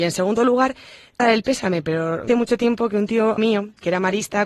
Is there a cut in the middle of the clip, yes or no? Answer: yes